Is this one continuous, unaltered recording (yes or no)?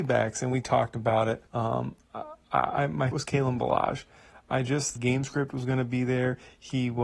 no